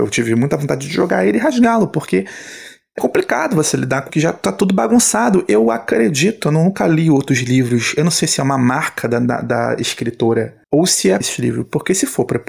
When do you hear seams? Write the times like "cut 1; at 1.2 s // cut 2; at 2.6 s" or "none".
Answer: cut 1; at 3.0 s // cut 2; at 4.1 s // cut 3; at 10.6 s // cut 4; at 11.2 s